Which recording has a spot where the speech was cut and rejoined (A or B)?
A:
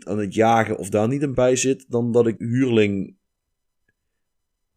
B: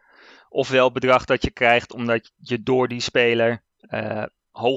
A